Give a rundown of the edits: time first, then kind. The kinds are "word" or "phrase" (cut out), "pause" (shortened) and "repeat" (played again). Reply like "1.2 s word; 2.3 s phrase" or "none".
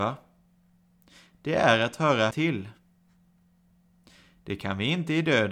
2.3 s word